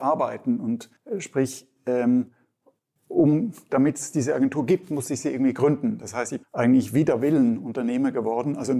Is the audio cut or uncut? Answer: cut